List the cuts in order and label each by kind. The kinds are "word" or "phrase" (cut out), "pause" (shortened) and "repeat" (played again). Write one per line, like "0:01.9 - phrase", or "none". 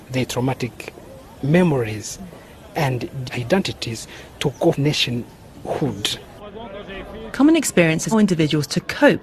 0:03.3 - word
0:04.7 - word
0:08.1 - word